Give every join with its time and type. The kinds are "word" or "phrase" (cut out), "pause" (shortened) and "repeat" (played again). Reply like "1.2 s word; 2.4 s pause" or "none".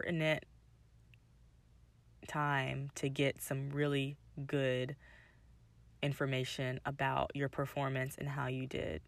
none